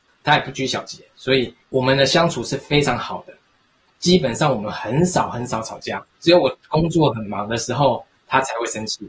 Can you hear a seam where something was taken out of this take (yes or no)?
yes